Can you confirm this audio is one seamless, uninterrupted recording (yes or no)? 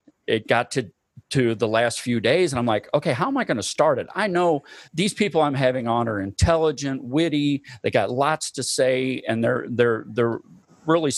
no